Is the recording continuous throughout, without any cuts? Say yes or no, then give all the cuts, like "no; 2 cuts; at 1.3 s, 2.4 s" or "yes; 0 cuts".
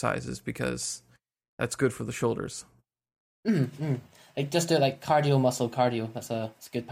yes; 0 cuts